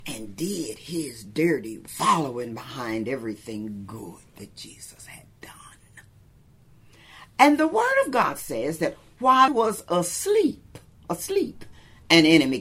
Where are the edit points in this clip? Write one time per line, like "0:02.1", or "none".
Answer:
0:01.9
0:09.5